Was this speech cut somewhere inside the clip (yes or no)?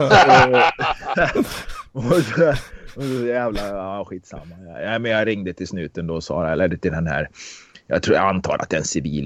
no